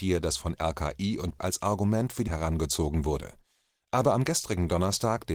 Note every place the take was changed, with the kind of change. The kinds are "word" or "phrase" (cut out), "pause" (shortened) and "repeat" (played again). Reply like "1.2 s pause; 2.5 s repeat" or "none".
1.4 s word; 2.3 s word